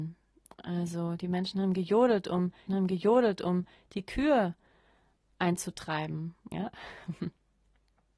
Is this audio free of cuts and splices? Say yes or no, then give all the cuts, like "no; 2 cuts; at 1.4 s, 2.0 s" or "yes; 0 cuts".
no; 2 cuts; at 2.7 s, 6.5 s